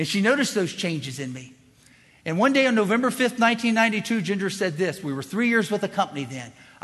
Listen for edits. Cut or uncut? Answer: uncut